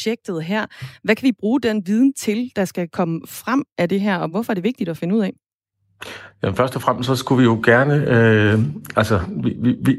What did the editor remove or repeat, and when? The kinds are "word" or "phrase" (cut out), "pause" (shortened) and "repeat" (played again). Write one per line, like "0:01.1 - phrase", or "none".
none